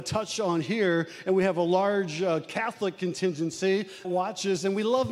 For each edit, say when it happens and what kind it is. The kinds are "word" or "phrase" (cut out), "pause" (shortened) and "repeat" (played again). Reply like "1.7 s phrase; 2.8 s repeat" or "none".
4.0 s word

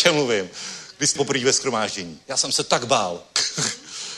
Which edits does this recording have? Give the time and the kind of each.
1.2 s word; 2.2 s pause

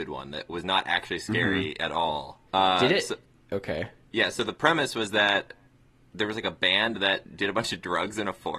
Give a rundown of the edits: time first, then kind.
2.5 s pause

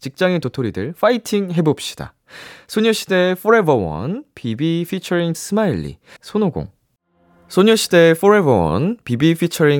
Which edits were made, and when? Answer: 5.3 s word; 6.2 s word

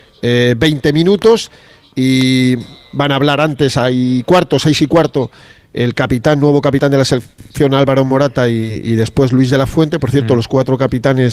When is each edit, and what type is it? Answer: none

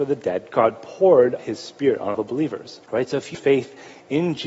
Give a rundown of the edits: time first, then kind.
1.4 s word; 2.1 s word; 2.8 s pause; 3.3 s phrase

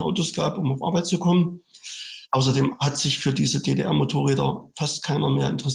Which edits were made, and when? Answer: 2.3 s pause

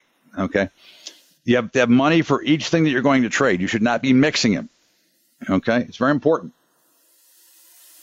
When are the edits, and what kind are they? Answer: none

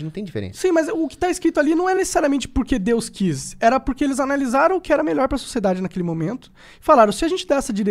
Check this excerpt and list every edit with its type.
none

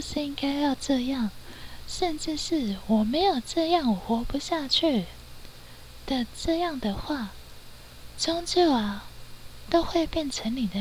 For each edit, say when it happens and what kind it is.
8.1 s phrase

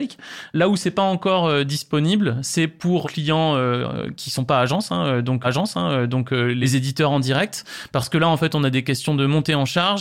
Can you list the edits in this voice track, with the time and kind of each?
3.0 s word; 5.4 s repeat

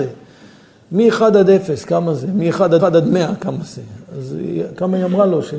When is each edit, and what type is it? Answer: 2.8 s repeat

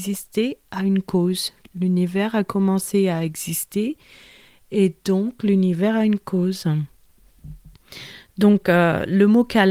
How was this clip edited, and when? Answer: none

